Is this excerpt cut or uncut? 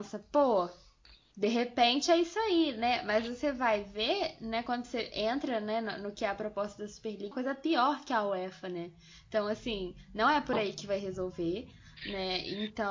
cut